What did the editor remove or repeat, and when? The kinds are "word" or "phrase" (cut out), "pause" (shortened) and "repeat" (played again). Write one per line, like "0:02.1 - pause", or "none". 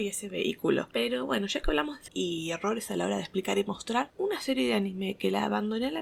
0:02.1 - phrase